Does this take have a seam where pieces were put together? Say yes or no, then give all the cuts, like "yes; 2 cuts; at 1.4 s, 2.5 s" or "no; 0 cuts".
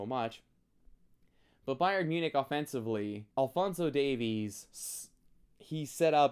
yes; 1 cut; at 3.3 s